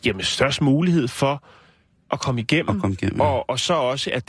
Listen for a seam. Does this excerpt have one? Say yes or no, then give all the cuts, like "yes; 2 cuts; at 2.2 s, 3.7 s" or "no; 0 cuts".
no; 0 cuts